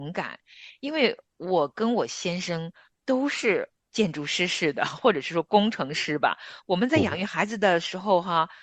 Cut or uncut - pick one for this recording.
uncut